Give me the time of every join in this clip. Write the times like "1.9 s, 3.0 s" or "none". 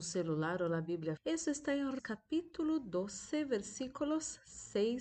1.2 s, 2.0 s